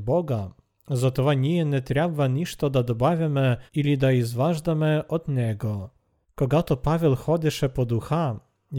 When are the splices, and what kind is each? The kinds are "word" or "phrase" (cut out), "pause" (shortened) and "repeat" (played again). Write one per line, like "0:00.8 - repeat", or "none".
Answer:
0:03.7 - pause
0:06.2 - pause